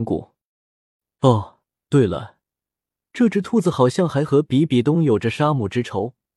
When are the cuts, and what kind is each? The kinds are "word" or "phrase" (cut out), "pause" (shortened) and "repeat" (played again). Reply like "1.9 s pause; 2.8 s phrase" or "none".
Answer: 1.7 s pause